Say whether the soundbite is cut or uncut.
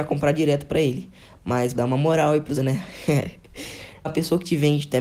cut